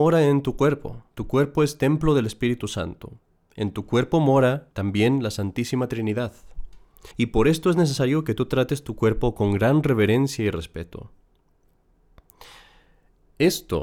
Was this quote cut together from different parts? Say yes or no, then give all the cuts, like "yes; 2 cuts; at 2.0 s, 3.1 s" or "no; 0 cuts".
yes; 3 cuts; at 1.1 s, 4.7 s, 7.1 s